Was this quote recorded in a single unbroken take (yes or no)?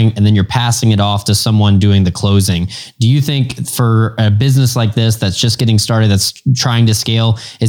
yes